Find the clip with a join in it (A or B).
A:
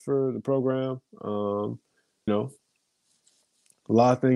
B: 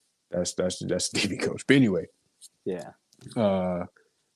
A